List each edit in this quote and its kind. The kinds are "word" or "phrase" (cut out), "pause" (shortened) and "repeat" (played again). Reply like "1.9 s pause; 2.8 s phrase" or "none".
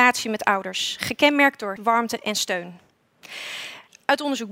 1.8 s word